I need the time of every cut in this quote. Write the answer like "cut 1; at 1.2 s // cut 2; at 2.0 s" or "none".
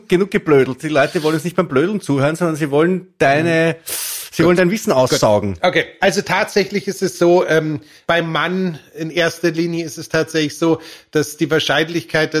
none